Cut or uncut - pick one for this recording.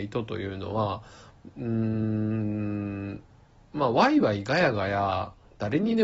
uncut